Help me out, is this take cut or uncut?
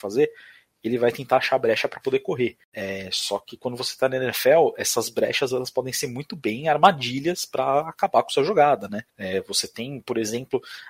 cut